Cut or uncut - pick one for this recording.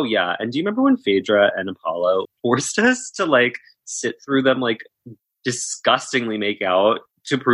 cut